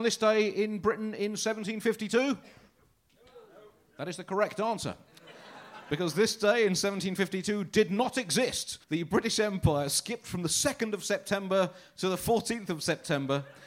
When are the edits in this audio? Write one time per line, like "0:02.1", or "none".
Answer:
0:08.8